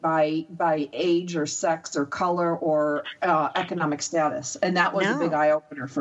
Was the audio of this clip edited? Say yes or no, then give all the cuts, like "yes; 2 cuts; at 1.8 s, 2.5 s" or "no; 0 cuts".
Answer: no; 0 cuts